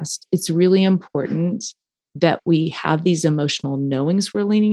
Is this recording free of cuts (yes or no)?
yes